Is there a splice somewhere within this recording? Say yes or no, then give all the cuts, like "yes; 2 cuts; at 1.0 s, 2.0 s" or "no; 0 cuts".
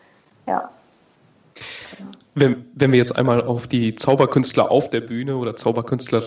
no; 0 cuts